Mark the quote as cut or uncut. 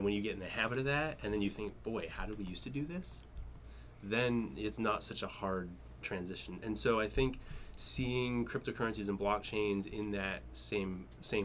uncut